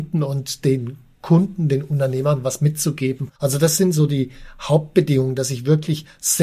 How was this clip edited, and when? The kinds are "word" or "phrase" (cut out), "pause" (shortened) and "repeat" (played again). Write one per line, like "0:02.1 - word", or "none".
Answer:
0:03.3 - pause